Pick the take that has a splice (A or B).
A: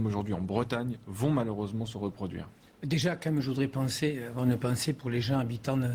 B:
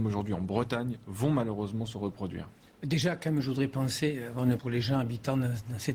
B